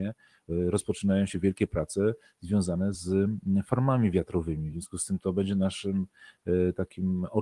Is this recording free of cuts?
yes; 0 cuts

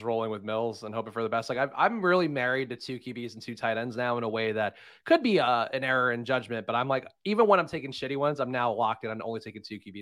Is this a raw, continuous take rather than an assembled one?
yes; 0 cuts

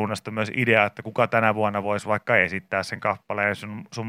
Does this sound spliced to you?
no; 0 cuts

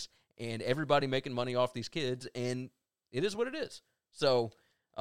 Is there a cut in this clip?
no; 0 cuts

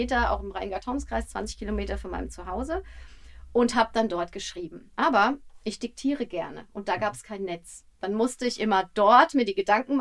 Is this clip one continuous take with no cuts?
yes; 0 cuts

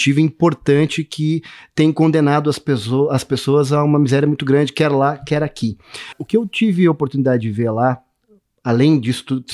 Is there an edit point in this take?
no; 0 cuts

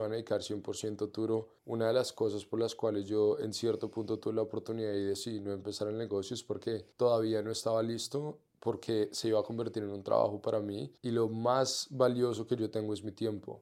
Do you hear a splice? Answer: yes; 4 cuts; at 1.6 s, 6.9 s, 8.5 s, 11.0 s

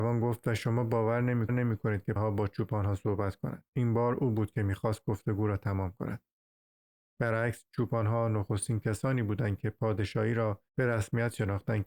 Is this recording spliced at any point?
yes; 4 cuts; at 1.5 s, 2.2 s, 3.7 s, 10.7 s

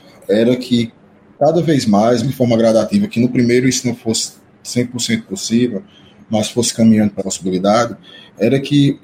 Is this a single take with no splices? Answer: no; 2 cuts; at 2.2 s, 7.2 s

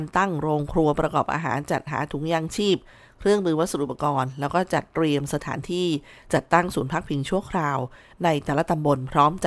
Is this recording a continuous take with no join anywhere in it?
yes; 0 cuts

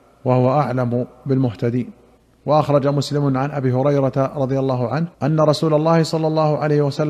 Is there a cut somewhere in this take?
yes; 2 cuts; at 2.2 s, 5.1 s

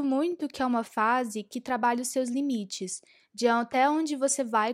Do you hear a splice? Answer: no; 0 cuts

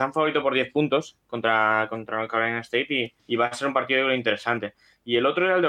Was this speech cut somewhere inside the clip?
yes; 1 cut; at 3.2 s

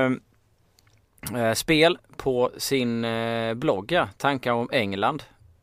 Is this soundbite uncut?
yes; 0 cuts

